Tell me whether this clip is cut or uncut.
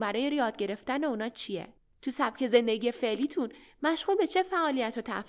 cut